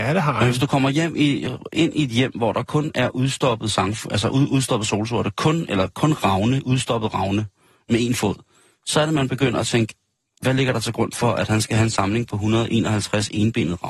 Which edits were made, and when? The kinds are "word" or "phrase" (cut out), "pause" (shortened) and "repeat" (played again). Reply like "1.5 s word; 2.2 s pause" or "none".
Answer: none